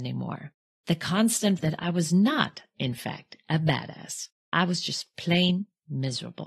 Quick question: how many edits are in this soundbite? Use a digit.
1